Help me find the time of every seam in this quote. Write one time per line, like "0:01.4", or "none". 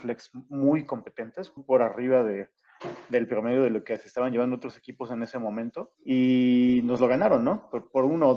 0:01.6
0:05.9